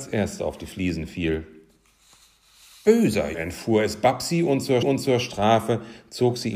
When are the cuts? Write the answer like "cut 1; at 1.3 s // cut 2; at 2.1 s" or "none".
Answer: cut 1; at 3.3 s // cut 2; at 4.8 s